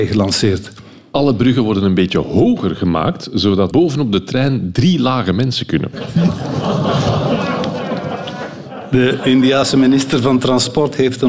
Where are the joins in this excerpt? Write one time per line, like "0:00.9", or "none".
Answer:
0:03.7